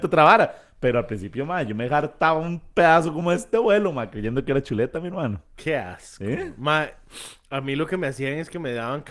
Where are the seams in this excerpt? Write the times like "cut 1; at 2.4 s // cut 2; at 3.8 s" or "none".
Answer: none